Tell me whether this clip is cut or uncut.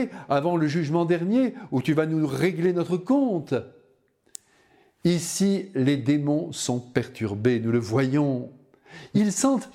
uncut